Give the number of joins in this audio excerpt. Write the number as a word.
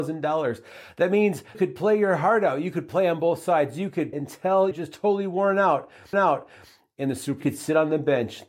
five